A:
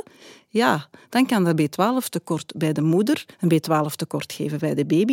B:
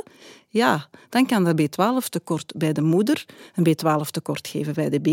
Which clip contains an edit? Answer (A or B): A